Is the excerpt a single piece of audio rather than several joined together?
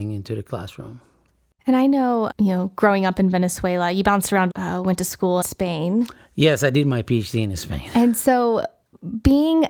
no; 3 cuts; at 2.3 s, 4.5 s, 5.4 s

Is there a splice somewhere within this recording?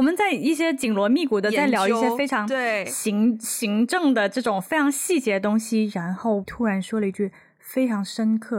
yes; 1 cut; at 6.4 s

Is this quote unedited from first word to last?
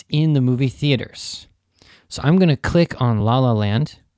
yes; 0 cuts

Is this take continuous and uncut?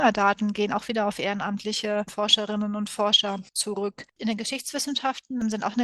yes; 0 cuts

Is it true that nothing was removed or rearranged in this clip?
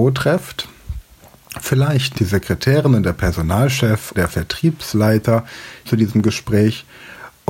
no; 3 cuts; at 2.1 s, 4.1 s, 5.9 s

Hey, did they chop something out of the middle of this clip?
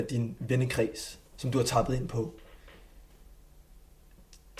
yes; 1 cut; at 1.3 s

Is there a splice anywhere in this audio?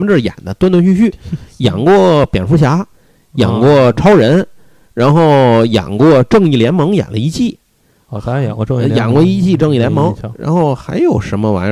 no; 0 cuts

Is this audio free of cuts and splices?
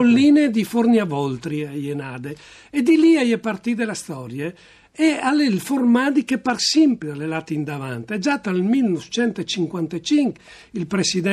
yes; 0 cuts

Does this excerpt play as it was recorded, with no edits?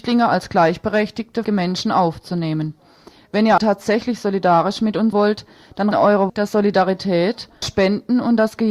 no; 6 cuts; at 1.4 s, 3.6 s, 5.1 s, 5.9 s, 6.3 s, 7.6 s

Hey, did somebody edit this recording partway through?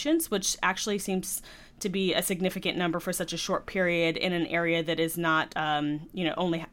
no; 0 cuts

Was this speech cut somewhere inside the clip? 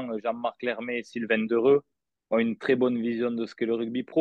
no; 0 cuts

